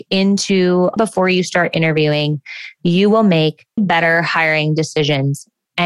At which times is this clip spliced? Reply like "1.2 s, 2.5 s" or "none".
1.0 s, 3.8 s

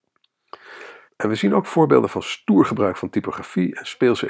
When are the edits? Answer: 1.1 s

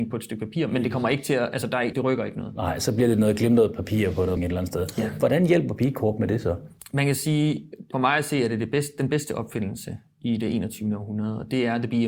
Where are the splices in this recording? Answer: 1.9 s, 4.4 s

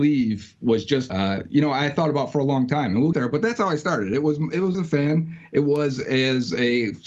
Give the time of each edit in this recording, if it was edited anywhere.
1.1 s, 3.1 s, 4.7 s

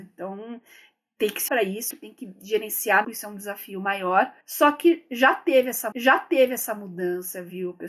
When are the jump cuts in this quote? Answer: 1.5 s, 1.9 s, 3.0 s, 4.4 s, 5.9 s

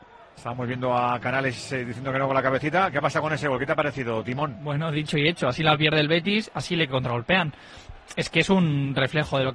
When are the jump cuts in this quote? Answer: none

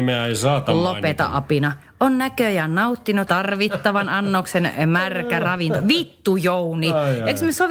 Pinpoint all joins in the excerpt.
3.3 s

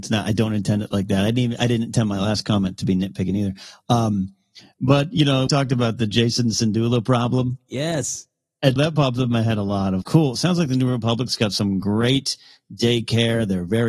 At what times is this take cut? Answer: 5.5 s, 8.8 s, 10.0 s

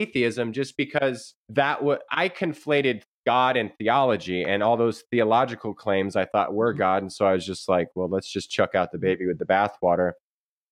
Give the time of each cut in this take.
1.4 s, 2.1 s

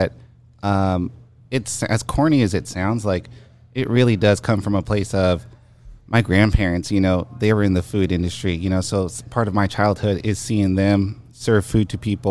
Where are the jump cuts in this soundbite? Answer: none

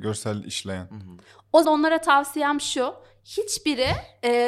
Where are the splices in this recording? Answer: 1.6 s

